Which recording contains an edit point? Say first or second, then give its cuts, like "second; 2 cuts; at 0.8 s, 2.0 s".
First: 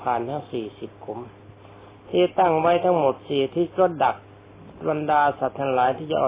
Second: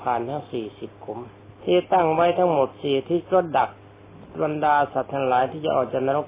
second; 1 cut; at 1.6 s